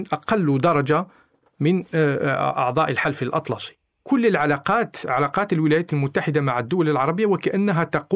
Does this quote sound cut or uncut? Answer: uncut